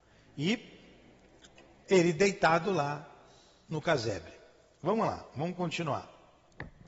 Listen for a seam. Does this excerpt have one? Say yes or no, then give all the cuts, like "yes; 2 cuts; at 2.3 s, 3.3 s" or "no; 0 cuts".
yes; 1 cut; at 1.8 s